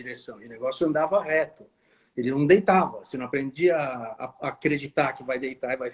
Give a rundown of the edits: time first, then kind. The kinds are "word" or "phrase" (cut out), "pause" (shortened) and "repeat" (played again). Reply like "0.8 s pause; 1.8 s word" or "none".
none